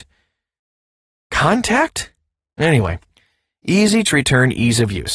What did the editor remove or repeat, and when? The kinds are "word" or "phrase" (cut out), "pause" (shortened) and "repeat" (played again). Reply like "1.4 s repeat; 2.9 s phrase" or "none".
4.0 s word

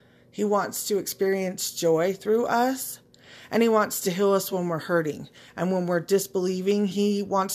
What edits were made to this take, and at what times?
none

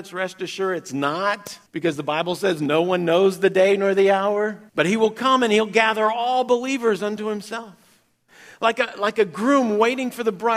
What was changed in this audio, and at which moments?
1.7 s pause; 4.7 s pause

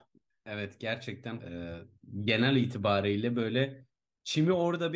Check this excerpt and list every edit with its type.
1.4 s word

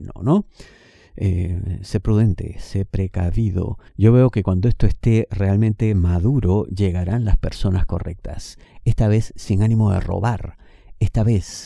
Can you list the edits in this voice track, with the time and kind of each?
3.9 s pause

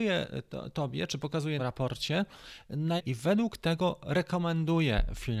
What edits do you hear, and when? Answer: 1.6 s phrase; 3.0 s phrase

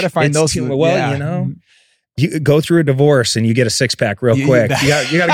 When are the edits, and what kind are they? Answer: none

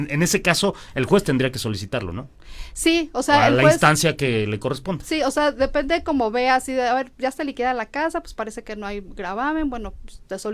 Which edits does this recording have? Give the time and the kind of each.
none

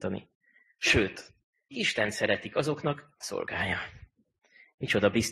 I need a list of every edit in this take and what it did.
1.7 s word; 3.2 s phrase

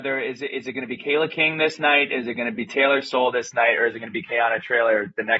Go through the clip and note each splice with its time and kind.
none

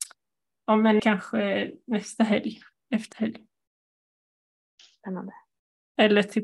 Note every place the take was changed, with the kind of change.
1.0 s word; 3.1 s word

